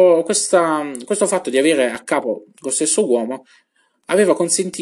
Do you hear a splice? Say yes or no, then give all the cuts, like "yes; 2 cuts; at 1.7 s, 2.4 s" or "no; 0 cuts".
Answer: no; 0 cuts